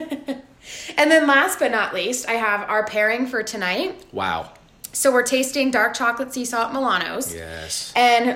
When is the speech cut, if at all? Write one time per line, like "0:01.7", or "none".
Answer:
none